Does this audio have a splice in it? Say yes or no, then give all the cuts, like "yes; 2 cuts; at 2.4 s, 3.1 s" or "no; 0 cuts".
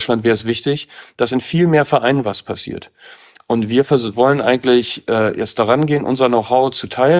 no; 0 cuts